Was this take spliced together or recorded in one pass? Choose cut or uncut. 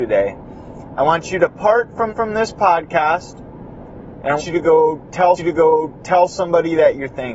cut